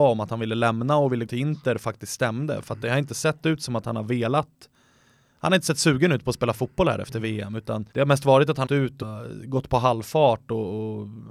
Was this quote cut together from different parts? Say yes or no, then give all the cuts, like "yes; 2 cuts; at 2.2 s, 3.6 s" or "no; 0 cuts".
yes; 4 cuts; at 1.3 s, 7.9 s, 8.7 s, 9.0 s